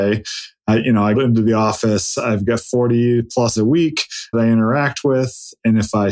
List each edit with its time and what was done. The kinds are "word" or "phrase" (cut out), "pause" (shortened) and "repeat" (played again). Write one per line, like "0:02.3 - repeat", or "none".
0:01.1 - word
0:03.6 - word
0:04.3 - phrase